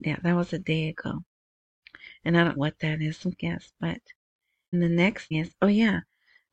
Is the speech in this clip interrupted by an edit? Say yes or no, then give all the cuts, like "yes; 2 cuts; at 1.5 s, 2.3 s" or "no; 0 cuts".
yes; 4 cuts; at 2.6 s, 3.3 s, 4.7 s, 5.3 s